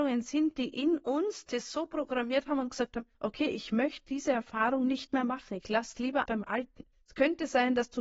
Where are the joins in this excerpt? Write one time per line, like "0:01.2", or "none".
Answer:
0:03.1
0:06.3
0:06.9